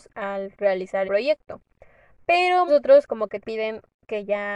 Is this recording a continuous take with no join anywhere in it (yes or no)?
no